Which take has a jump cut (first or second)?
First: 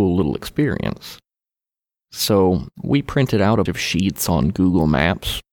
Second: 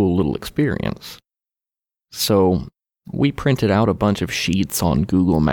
first